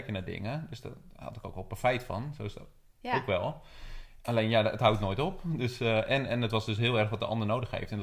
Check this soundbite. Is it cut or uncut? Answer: uncut